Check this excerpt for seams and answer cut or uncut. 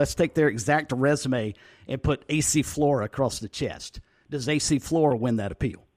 uncut